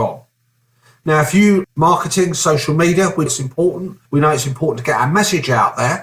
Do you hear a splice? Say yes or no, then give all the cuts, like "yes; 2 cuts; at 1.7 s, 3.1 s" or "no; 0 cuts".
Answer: yes; 3 cuts; at 1.6 s, 3.3 s, 4.0 s